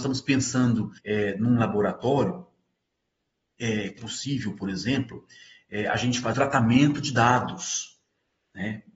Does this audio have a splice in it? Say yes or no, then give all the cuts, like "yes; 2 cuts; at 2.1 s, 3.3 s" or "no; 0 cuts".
yes; 3 cuts; at 1.0 s, 4.0 s, 6.3 s